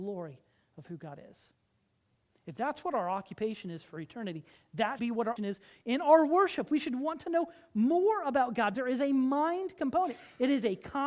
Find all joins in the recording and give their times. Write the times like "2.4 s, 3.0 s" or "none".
5.0 s, 5.4 s, 8.7 s